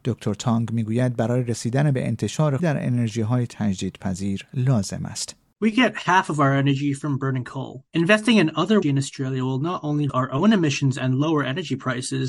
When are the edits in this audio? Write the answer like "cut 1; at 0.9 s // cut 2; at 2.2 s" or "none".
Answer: cut 1; at 2.6 s // cut 2; at 7.9 s // cut 3; at 8.8 s // cut 4; at 10.1 s